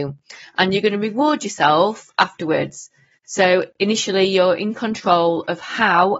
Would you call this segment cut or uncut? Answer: uncut